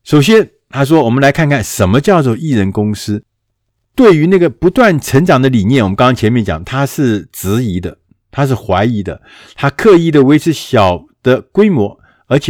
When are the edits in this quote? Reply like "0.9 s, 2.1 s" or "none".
none